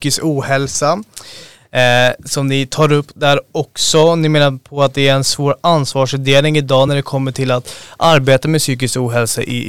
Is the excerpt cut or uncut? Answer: uncut